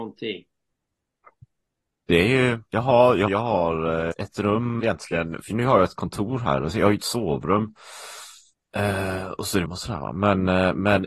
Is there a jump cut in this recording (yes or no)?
yes